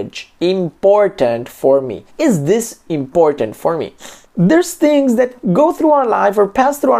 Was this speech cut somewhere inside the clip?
yes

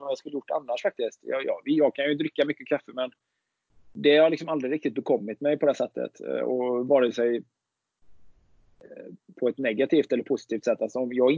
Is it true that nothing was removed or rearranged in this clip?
yes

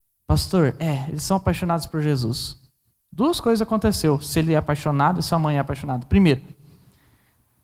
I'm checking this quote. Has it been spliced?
no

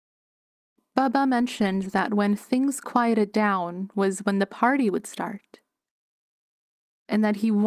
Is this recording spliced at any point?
no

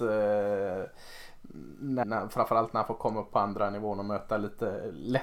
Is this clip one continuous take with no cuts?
no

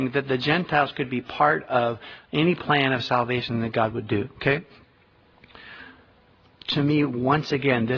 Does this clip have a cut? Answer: no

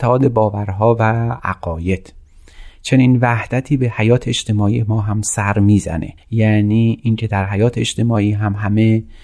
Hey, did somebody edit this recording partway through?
yes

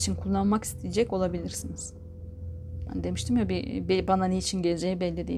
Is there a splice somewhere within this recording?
no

